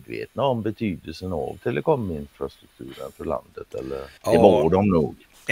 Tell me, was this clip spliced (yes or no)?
yes